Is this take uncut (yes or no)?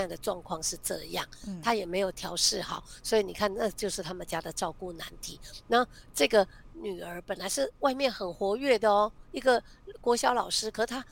yes